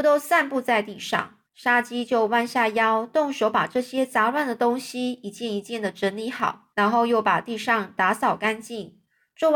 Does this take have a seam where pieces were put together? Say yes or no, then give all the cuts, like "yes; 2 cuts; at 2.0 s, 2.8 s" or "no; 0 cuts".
yes; 2 cuts; at 1.5 s, 6.7 s